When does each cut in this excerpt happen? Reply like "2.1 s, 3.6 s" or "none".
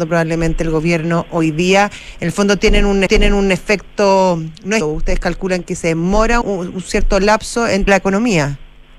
3.1 s, 4.8 s, 6.4 s, 7.9 s